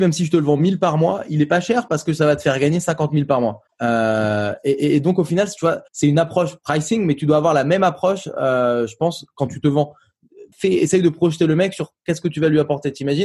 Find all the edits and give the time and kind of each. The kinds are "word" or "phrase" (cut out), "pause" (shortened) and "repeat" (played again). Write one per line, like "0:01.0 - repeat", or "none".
0:03.7 - pause
0:05.9 - pause
0:10.5 - pause